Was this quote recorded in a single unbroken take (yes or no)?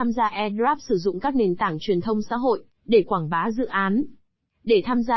yes